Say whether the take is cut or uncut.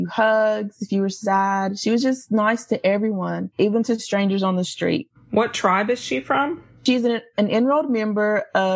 uncut